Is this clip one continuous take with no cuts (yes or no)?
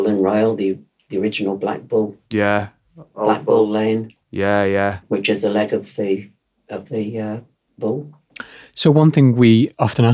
no